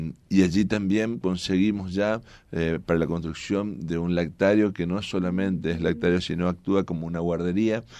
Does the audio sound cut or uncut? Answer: uncut